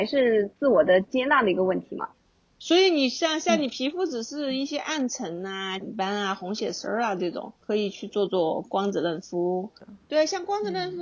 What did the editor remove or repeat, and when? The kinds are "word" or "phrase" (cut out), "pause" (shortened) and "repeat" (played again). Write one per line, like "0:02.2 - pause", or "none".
0:05.8 - word
0:07.6 - pause